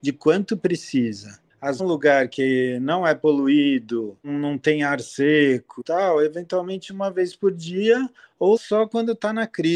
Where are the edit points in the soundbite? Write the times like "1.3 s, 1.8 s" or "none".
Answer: 1.8 s, 5.8 s, 8.6 s